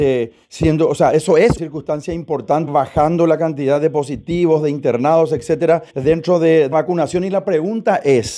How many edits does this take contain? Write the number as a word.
four